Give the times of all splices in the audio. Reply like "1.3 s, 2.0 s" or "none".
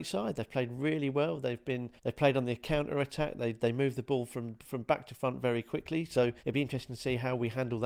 2.0 s, 6.4 s